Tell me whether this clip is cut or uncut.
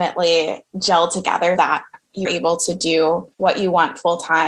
cut